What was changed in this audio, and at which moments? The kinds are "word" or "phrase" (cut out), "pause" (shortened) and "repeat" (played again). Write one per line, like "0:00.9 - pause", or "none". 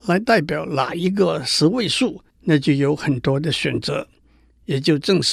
0:02.3 - pause